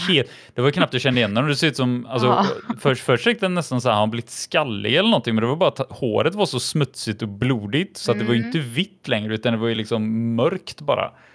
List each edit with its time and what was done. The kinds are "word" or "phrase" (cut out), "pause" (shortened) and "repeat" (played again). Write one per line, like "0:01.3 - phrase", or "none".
none